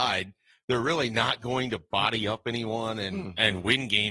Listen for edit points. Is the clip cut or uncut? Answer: uncut